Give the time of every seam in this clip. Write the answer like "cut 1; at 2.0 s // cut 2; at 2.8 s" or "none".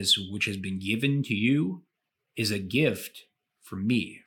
none

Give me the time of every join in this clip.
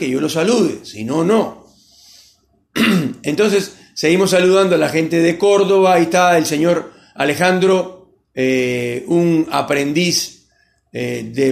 cut 1; at 8.2 s

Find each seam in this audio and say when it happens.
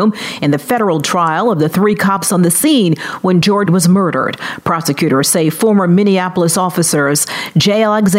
cut 1; at 3.7 s

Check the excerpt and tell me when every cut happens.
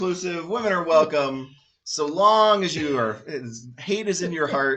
none

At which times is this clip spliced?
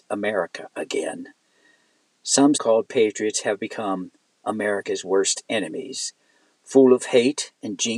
cut 1; at 2.5 s

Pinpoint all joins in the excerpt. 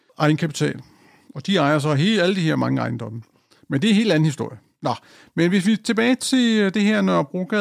none

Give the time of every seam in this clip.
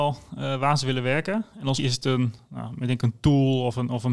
cut 1; at 1.8 s

